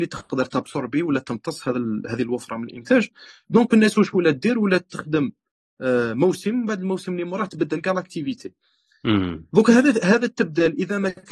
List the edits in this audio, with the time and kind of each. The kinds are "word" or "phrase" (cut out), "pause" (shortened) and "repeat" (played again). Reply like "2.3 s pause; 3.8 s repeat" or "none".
none